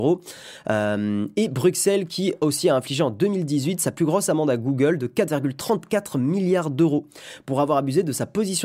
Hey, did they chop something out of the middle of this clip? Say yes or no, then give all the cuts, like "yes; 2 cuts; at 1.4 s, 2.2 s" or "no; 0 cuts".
no; 0 cuts